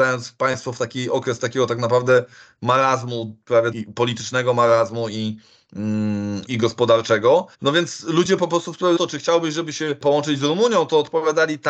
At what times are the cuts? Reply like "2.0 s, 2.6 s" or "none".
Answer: 3.7 s, 6.5 s, 7.5 s, 9.0 s

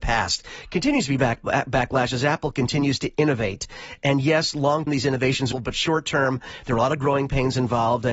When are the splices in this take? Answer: 4.9 s, 5.5 s

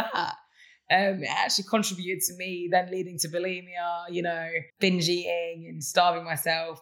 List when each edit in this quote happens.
4.7 s

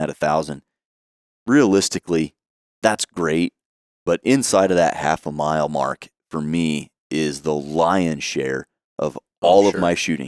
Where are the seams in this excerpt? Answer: none

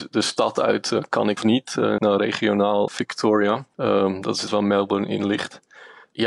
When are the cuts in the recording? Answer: 1.4 s, 2.0 s, 2.9 s, 4.5 s

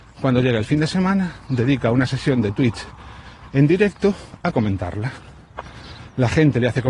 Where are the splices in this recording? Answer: none

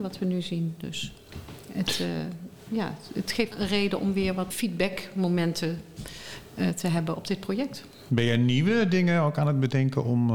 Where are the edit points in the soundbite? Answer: 3.5 s, 4.5 s, 7.1 s

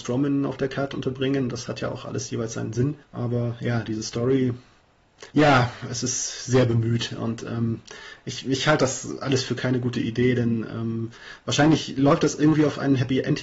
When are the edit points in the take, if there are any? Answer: 3.0 s, 5.3 s

